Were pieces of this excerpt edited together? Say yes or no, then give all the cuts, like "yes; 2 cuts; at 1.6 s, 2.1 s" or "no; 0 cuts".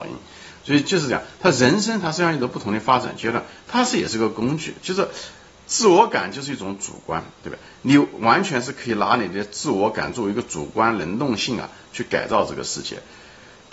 no; 0 cuts